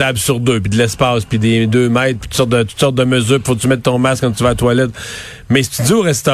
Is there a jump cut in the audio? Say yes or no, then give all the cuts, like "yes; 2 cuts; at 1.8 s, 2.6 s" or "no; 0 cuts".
no; 0 cuts